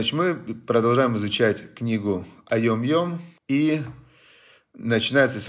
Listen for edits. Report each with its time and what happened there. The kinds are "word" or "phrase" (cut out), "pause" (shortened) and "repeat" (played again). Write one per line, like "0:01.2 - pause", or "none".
0:03.4 - pause